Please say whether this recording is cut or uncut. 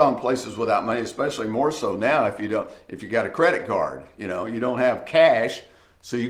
uncut